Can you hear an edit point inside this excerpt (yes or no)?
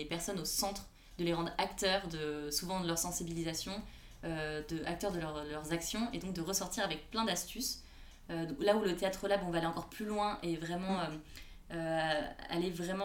no